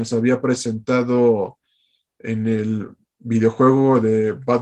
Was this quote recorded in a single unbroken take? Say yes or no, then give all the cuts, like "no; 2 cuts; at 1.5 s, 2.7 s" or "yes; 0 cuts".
yes; 0 cuts